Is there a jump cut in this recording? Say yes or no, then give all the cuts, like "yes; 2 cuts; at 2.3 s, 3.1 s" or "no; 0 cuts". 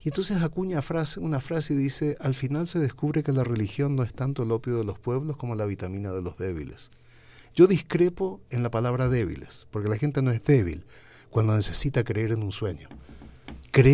no; 0 cuts